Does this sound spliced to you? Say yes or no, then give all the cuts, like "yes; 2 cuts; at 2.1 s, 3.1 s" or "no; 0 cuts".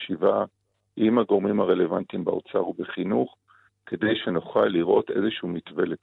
no; 0 cuts